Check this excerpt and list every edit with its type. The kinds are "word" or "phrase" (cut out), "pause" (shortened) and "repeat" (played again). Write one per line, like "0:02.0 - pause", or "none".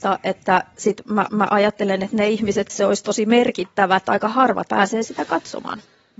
0:01.3 - repeat
0:02.7 - word
0:04.0 - phrase
0:04.7 - word

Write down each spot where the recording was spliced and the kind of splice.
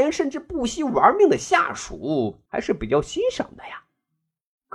0:02.5 - pause

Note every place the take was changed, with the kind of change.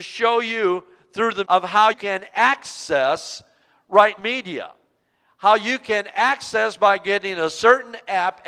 0:01.4 - word
0:01.9 - word
0:04.2 - word

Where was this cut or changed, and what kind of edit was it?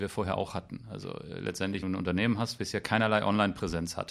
0:01.8 - phrase
0:02.6 - word

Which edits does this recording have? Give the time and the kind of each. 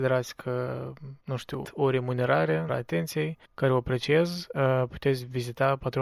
0:01.2 - pause
0:01.6 - word
0:02.7 - word
0:03.5 - pause

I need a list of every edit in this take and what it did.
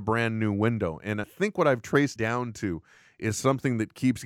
0:01.2 - word
0:02.2 - word

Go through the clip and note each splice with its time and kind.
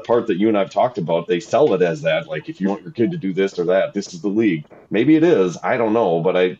0:02.6 - word
0:03.9 - word
0:04.8 - pause

